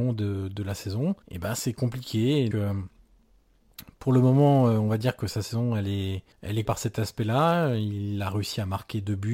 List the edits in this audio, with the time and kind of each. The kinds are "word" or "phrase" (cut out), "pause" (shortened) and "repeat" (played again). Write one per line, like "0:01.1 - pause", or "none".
0:01.2 - pause
0:02.5 - word
0:06.3 - pause
0:06.6 - word